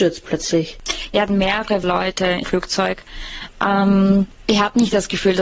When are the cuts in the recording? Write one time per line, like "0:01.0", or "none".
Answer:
0:01.3
0:01.8
0:02.4